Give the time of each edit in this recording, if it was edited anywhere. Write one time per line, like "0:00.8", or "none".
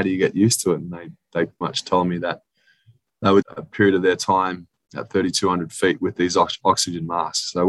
0:01.6
0:03.4